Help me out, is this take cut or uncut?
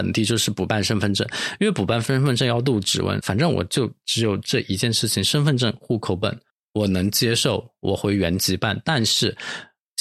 cut